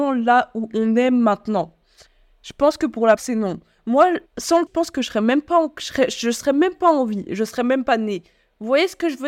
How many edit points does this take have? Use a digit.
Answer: 3